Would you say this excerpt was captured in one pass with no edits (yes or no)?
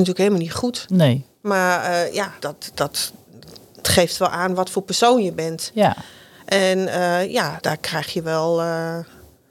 no